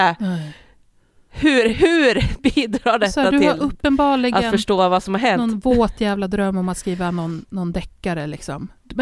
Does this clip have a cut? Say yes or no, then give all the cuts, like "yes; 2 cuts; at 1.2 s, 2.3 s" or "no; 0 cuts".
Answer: no; 0 cuts